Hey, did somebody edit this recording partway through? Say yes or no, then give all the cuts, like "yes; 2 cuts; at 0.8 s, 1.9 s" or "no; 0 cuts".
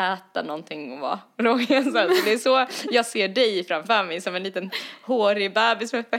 no; 0 cuts